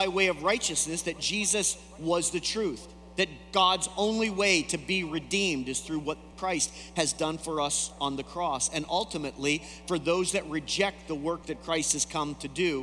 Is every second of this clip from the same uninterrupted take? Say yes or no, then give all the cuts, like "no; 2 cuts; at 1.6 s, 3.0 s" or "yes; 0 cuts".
yes; 0 cuts